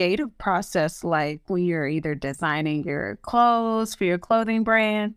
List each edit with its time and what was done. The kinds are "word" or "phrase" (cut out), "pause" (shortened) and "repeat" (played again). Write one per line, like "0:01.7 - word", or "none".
none